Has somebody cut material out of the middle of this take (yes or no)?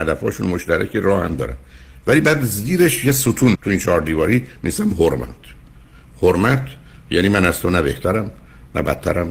yes